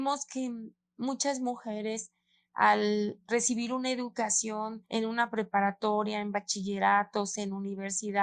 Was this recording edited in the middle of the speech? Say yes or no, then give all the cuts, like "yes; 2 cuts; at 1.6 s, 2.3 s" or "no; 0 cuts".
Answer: no; 0 cuts